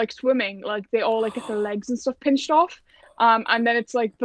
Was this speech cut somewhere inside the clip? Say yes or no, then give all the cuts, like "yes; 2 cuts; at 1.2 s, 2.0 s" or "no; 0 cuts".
no; 0 cuts